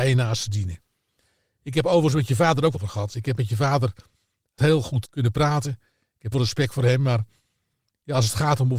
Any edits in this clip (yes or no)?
yes